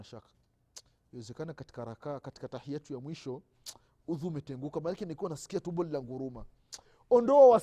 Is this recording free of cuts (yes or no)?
yes